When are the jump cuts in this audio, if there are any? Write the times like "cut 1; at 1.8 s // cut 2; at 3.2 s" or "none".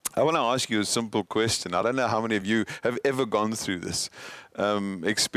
none